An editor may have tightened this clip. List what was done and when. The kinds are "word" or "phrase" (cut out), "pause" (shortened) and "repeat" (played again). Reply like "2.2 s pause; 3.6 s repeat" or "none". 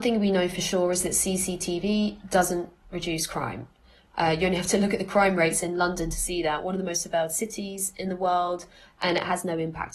none